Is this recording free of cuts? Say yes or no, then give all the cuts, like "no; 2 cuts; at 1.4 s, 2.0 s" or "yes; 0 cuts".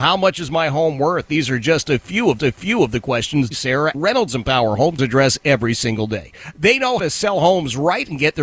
no; 5 cuts; at 2.4 s, 3.5 s, 3.9 s, 5.0 s, 7.0 s